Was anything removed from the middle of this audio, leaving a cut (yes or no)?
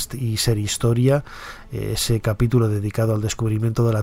no